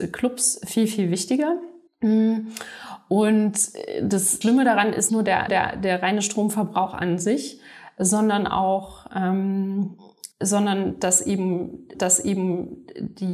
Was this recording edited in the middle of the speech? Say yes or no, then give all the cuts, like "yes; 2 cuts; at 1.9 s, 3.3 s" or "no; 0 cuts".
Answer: yes; 6 cuts; at 1.9 s, 4.4 s, 5.1 s, 5.5 s, 10.3 s, 11.9 s